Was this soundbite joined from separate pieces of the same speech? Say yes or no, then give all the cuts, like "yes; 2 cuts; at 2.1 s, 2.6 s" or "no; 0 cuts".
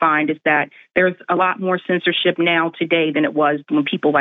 no; 0 cuts